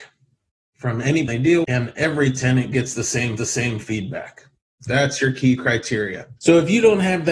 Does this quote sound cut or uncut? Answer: cut